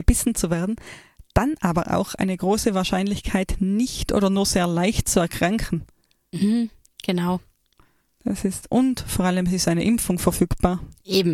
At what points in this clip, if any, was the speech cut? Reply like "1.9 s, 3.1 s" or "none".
6.8 s

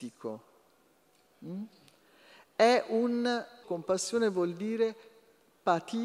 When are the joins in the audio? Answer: 3.6 s

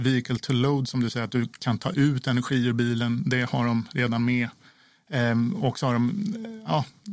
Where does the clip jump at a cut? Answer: none

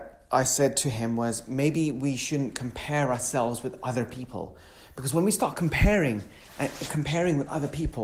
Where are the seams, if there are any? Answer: none

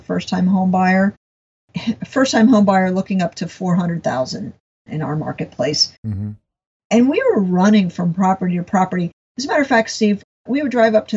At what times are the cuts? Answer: none

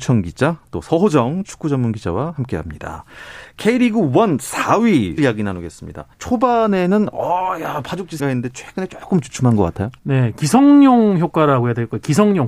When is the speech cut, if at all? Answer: 5.2 s, 6.1 s, 8.2 s, 10.0 s

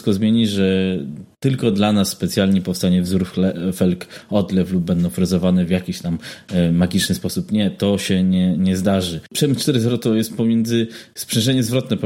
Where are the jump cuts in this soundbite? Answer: none

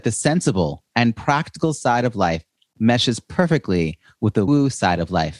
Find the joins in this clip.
4.5 s

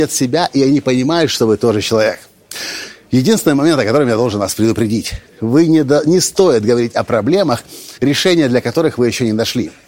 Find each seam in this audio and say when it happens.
5.3 s, 8.0 s

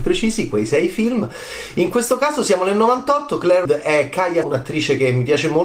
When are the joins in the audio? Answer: 3.7 s, 4.4 s

